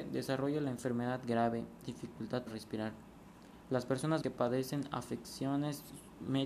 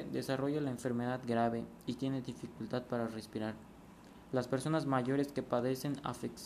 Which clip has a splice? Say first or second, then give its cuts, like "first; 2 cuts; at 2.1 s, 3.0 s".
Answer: first; 3 cuts; at 1.8 s, 2.5 s, 4.2 s